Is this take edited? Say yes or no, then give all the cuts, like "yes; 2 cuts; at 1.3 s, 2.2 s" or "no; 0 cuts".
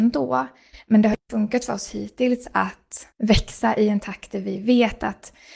yes; 1 cut; at 3.1 s